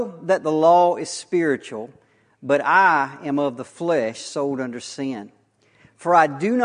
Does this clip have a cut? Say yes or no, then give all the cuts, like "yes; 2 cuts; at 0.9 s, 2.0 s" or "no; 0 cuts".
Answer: no; 0 cuts